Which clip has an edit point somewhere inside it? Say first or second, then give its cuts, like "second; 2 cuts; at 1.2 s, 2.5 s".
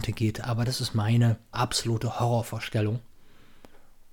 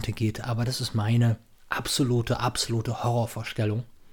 first; 1 cut; at 1.5 s